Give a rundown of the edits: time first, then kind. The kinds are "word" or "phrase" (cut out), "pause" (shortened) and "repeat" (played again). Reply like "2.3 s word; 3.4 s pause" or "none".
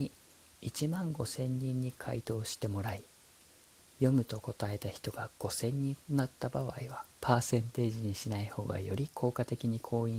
7.2 s pause

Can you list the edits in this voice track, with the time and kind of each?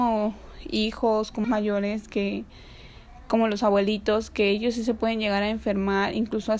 1.4 s word

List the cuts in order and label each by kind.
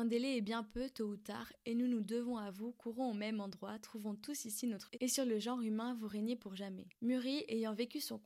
4.9 s phrase; 6.9 s pause

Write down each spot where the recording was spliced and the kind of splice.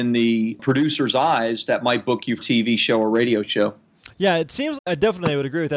2.4 s word; 4.8 s word

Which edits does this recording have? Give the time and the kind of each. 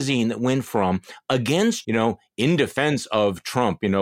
1.8 s phrase

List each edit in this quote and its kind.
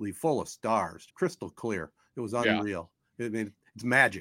1.1 s word

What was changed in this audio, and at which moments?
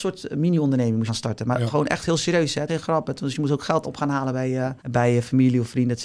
1.1 s phrase; 2.7 s word; 3.8 s word; 4.8 s pause

